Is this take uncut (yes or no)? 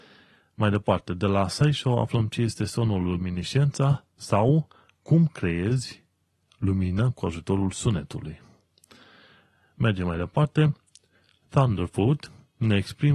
yes